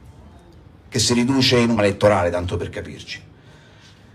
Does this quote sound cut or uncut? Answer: cut